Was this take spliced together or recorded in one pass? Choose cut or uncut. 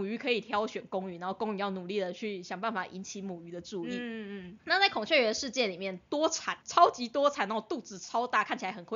cut